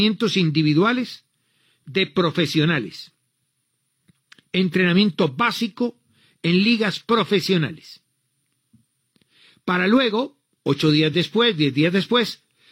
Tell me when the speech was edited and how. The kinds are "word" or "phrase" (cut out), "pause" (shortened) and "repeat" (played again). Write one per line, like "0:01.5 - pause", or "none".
none